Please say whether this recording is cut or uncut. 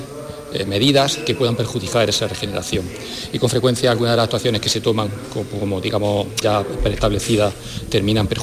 cut